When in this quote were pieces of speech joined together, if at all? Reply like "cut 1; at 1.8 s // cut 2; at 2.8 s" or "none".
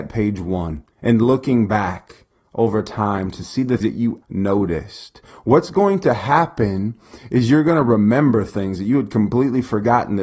cut 1; at 0.9 s // cut 2; at 3.8 s // cut 3; at 4.2 s

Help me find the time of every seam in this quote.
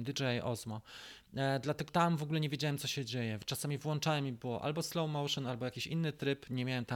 cut 1; at 1.9 s

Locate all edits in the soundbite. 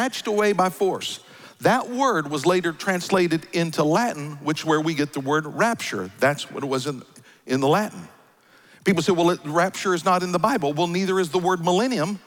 none

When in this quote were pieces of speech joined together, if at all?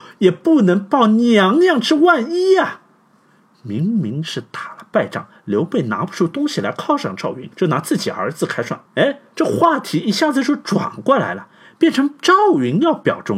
cut 1; at 7.5 s // cut 2; at 8.9 s

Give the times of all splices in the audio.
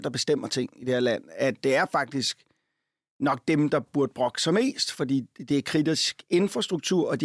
none

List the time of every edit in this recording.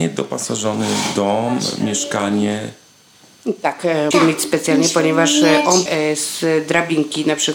cut 1; at 4.1 s // cut 2; at 5.9 s

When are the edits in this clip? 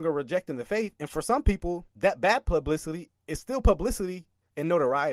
cut 1; at 1.9 s

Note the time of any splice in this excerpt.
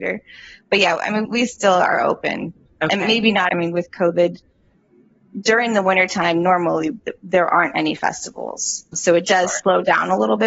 cut 1; at 1.2 s // cut 2; at 3.5 s // cut 3; at 7.2 s

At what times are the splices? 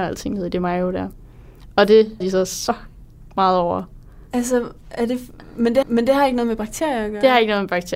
cut 1; at 2.2 s // cut 2; at 4.3 s // cut 3; at 5.8 s

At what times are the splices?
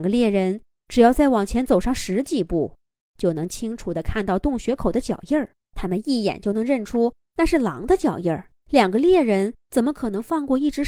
cut 1; at 3.0 s // cut 2; at 5.6 s // cut 3; at 8.6 s // cut 4; at 9.6 s

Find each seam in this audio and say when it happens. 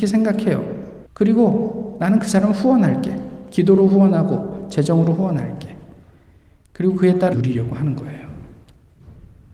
cut 1; at 1.1 s // cut 2; at 7.3 s

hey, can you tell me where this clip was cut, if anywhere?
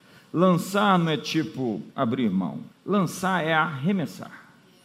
cut 1; at 1.9 s // cut 2; at 2.7 s

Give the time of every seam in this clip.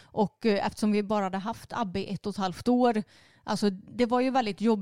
none

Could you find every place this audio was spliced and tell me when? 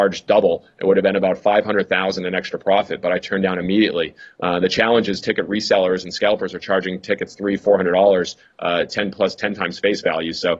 none

